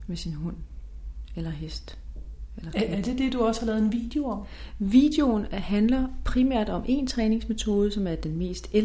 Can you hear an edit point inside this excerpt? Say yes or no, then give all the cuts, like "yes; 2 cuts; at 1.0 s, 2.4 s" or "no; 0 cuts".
no; 0 cuts